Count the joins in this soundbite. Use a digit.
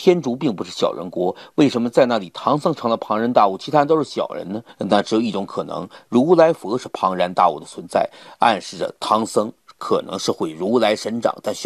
0